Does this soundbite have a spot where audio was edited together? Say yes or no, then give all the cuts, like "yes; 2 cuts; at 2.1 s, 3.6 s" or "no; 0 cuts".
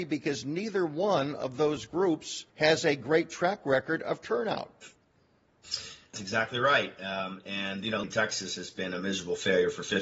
yes; 3 cuts; at 2.5 s, 6.1 s, 8.0 s